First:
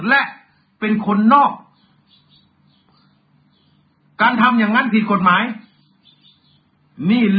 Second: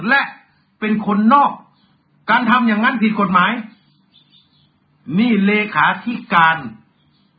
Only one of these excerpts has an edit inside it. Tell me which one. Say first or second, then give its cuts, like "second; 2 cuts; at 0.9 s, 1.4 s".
second; 1 cut; at 1.9 s